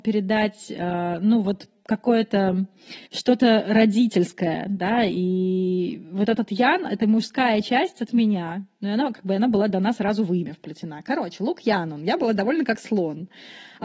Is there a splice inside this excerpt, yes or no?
yes